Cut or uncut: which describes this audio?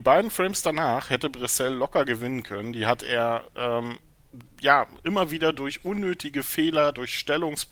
cut